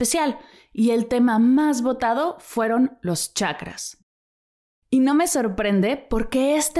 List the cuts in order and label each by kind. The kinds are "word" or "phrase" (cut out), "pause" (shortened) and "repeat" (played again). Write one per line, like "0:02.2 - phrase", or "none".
none